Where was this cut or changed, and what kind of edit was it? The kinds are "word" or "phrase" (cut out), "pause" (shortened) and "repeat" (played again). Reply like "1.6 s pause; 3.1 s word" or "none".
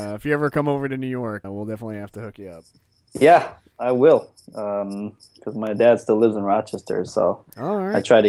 1.4 s word